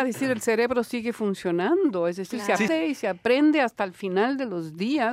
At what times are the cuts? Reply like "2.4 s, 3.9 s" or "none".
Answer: 2.7 s

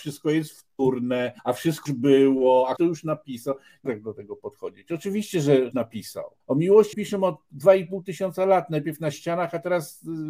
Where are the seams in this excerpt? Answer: 1.4 s, 1.9 s, 2.8 s, 3.9 s, 5.7 s, 6.4 s, 6.9 s

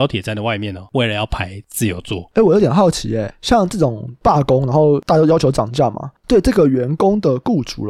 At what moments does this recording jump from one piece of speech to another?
0.9 s

